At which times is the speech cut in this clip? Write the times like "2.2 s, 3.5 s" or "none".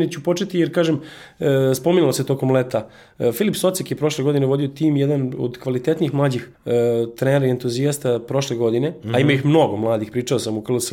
6.5 s